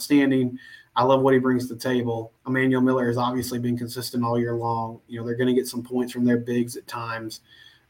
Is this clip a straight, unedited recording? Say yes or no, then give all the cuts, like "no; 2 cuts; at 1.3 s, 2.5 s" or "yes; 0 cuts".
no; 1 cut; at 2.4 s